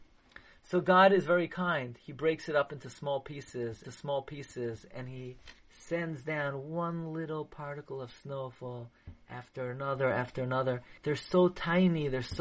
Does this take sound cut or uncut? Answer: cut